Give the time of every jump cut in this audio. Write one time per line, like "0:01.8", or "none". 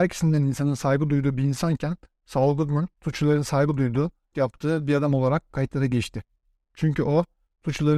0:02.9
0:04.3